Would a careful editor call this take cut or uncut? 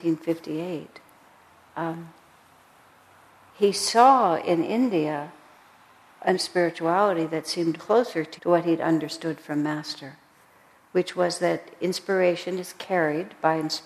cut